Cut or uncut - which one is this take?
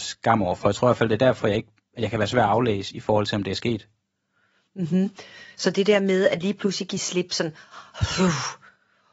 uncut